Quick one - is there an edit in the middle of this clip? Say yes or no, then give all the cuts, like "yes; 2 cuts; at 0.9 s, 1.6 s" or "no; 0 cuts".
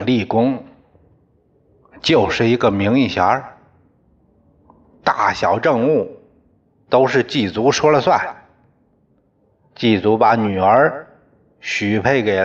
no; 0 cuts